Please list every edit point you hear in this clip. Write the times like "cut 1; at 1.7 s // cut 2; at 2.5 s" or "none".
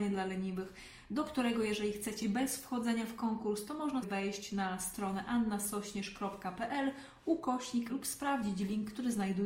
cut 1; at 2.2 s // cut 2; at 4.0 s // cut 3; at 7.9 s